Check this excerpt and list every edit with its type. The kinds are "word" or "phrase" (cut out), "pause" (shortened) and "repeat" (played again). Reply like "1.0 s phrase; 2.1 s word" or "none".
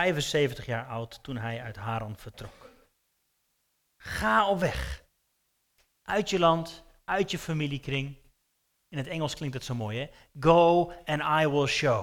none